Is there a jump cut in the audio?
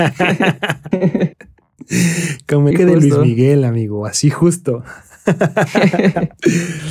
yes; 1 cut; at 2.7 s

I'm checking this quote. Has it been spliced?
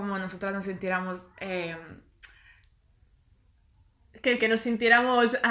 yes; 1 cut; at 4.4 s

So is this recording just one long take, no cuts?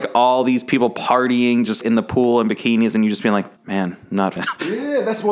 no; 3 cuts; at 1.8 s, 3.6 s, 4.4 s

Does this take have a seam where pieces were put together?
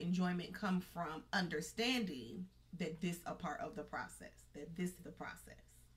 yes; 2 cuts; at 3.2 s, 5.0 s

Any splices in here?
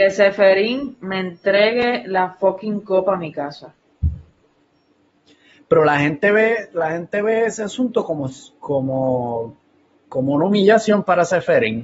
no; 0 cuts

